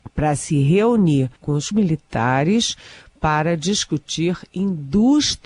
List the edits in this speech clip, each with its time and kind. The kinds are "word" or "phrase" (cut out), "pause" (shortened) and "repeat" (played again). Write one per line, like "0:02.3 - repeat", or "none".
0:01.4 - pause
0:01.7 - word